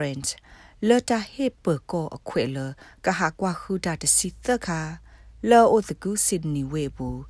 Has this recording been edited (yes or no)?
no